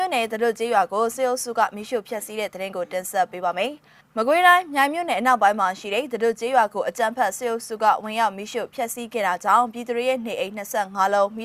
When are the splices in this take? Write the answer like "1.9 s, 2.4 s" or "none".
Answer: none